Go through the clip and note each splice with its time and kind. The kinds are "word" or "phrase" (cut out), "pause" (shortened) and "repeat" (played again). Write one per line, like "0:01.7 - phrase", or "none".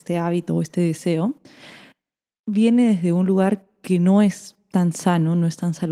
none

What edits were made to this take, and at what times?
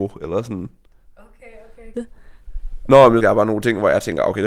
0:01.9 - phrase
0:03.2 - word

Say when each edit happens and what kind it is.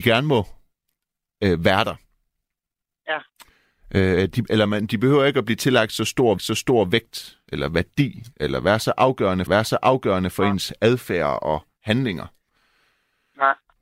0:06.4 - repeat
0:09.5 - repeat

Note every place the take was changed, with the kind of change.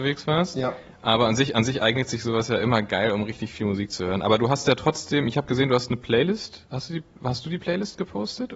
none

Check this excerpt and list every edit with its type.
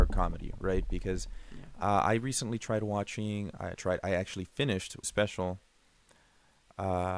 0:03.8 - word
0:05.0 - phrase

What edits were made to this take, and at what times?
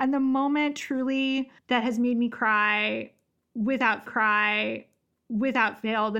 0:01.6 - pause
0:04.1 - repeat

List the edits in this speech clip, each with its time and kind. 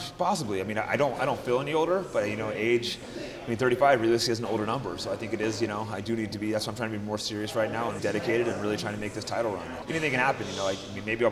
0:08.0 - word
0:09.8 - word

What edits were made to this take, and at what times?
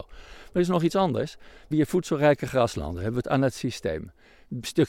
0:01.7 - word
0:03.2 - word

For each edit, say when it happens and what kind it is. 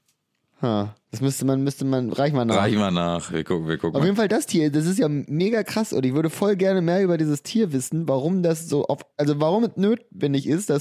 0:01.0 - pause
0:09.1 - pause

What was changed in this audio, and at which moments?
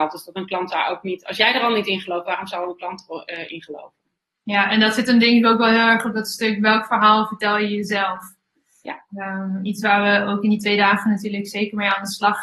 0:09.0 - pause

